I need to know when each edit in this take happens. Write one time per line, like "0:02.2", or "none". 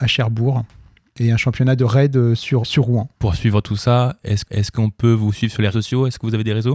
0:02.6
0:03.1
0:04.4
0:05.7